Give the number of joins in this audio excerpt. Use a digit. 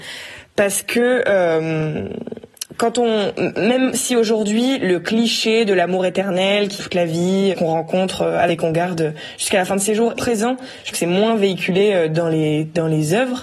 5